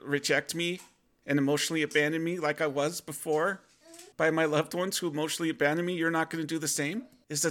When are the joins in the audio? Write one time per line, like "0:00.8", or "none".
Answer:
0:04.1